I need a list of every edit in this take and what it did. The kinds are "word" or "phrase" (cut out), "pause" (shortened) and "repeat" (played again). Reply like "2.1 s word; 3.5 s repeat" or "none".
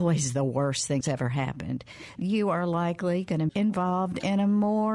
1.0 s word; 2.2 s word; 3.5 s word

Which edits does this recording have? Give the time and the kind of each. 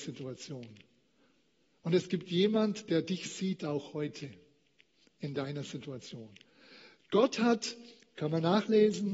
none

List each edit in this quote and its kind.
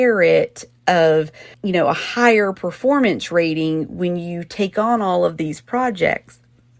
1.5 s pause

